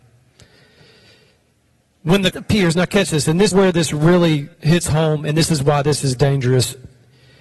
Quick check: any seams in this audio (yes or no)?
yes